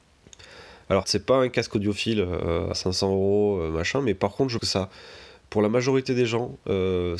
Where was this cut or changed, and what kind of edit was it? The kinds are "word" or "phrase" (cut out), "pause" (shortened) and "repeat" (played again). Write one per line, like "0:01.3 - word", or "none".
0:01.0 - word
0:02.7 - word
0:04.6 - word